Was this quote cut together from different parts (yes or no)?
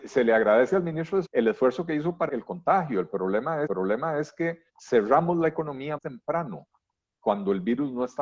yes